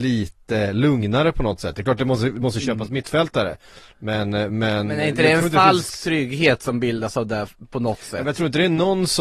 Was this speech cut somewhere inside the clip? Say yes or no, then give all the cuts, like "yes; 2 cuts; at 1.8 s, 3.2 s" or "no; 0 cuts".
no; 0 cuts